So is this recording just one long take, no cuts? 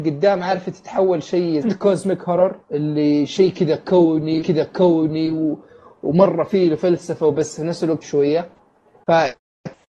no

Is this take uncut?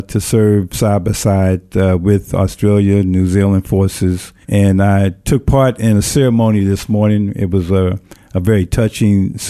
no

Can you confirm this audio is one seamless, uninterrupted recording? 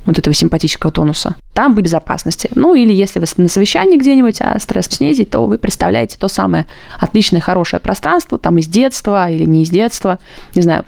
no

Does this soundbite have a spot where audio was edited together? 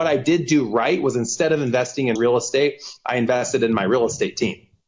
yes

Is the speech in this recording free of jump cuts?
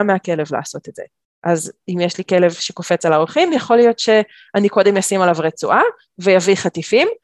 yes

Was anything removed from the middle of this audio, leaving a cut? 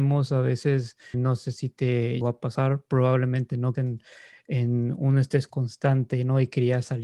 yes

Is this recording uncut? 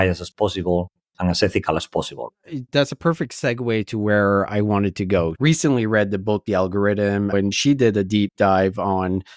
yes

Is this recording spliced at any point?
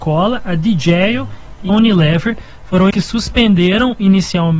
yes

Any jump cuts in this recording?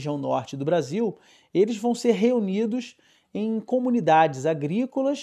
no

